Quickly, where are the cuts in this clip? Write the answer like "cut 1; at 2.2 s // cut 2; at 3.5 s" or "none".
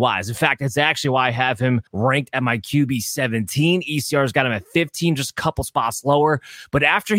cut 1; at 1.9 s